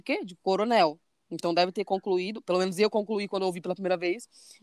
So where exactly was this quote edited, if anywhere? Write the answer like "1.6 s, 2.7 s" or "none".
none

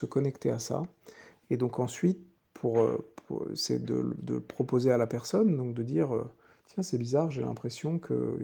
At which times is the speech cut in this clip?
none

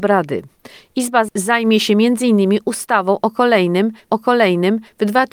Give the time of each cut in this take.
4.1 s

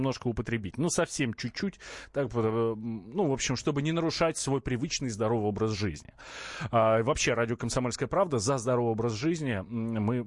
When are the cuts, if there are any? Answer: none

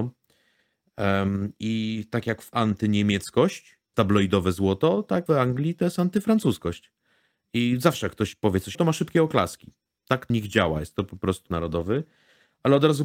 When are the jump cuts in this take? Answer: 2.5 s, 3.9 s, 5.3 s, 8.7 s, 10.3 s, 11.5 s

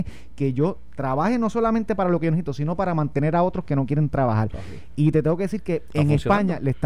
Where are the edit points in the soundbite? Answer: 5.9 s

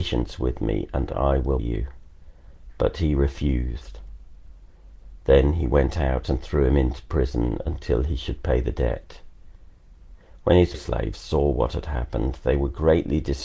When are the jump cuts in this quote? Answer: 1.6 s, 10.7 s

